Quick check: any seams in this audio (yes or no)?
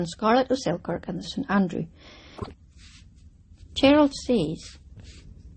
yes